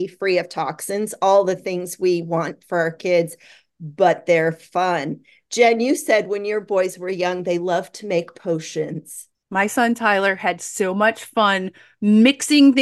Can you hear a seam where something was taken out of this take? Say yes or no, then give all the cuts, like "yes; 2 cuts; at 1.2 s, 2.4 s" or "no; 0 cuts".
no; 0 cuts